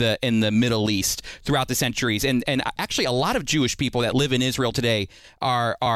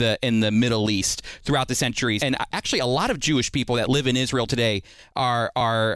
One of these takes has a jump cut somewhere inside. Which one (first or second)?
second